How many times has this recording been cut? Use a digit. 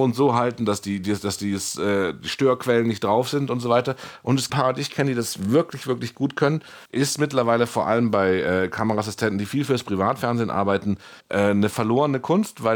3